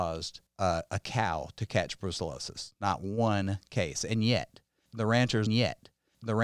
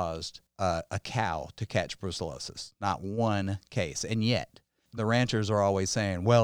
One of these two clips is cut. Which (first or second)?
first